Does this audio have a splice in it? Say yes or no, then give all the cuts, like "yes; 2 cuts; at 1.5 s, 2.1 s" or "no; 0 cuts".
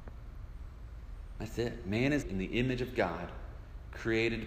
yes; 1 cut; at 2.2 s